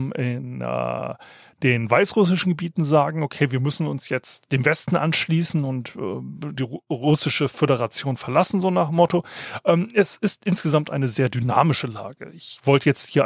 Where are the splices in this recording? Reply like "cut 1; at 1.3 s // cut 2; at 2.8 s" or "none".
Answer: none